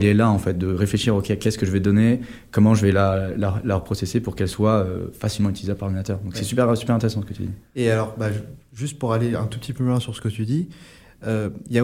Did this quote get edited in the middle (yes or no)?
no